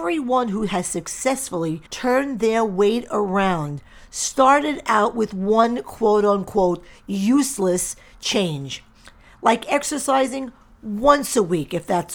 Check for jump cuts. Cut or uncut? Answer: cut